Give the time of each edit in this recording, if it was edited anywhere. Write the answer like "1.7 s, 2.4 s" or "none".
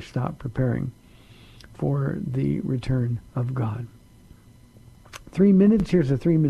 3.3 s

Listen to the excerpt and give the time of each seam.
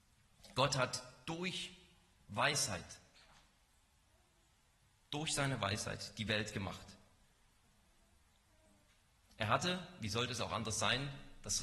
none

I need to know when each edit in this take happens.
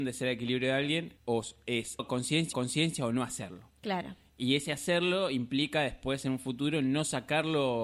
1.2 s, 2.0 s, 2.5 s

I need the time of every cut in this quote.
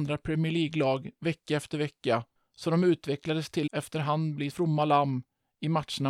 2.4 s, 3.7 s, 4.5 s

